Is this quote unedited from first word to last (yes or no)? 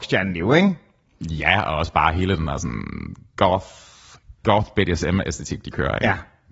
no